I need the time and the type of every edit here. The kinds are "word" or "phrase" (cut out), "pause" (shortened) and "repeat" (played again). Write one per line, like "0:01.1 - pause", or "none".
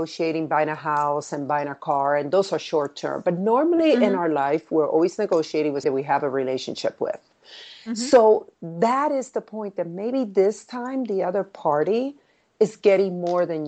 0:05.8 - word